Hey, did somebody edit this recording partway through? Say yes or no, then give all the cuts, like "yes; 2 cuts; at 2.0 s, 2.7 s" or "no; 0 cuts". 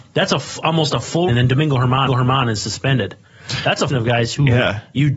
yes; 3 cuts; at 1.3 s, 2.1 s, 3.9 s